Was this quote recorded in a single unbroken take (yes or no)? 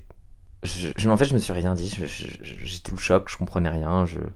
no